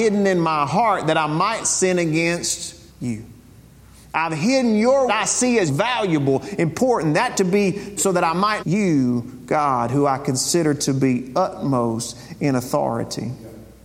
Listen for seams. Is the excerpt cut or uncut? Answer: cut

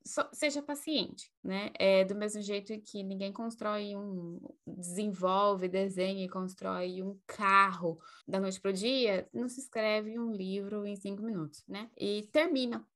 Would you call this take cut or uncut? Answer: cut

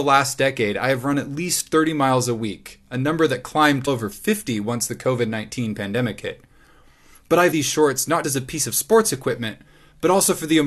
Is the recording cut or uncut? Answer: cut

